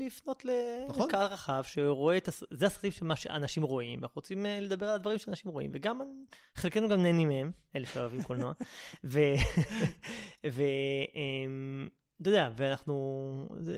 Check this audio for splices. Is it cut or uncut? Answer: uncut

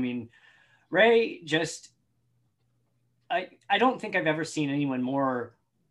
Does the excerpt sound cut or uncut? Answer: uncut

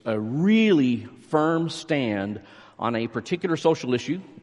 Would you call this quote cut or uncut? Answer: uncut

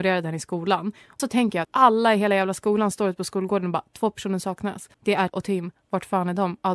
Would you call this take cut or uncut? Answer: cut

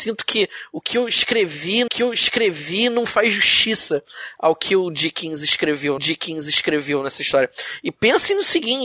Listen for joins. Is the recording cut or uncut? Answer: cut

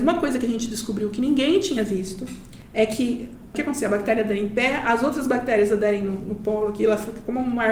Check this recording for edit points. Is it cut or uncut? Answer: uncut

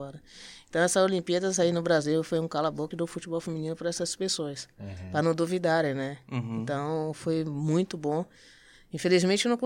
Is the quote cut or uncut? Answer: cut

